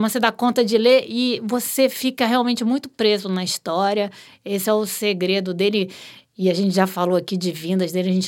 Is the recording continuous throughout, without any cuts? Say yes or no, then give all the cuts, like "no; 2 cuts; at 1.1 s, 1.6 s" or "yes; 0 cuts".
yes; 0 cuts